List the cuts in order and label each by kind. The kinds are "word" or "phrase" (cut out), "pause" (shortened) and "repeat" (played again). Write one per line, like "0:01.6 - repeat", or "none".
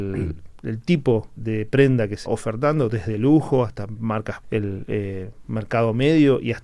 0:01.4 - word
0:02.3 - word
0:04.4 - phrase